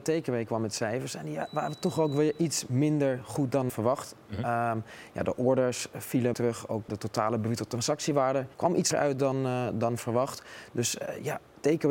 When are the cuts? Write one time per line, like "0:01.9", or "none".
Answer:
0:03.7
0:06.3
0:06.9
0:08.5
0:08.9